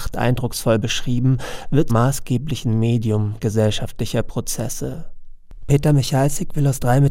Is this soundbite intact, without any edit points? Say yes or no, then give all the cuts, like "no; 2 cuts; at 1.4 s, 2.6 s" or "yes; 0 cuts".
no; 1 cut; at 1.9 s